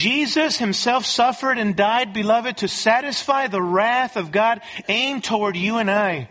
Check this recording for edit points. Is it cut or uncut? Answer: uncut